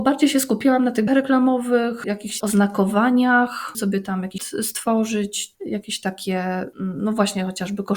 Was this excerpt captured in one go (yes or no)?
no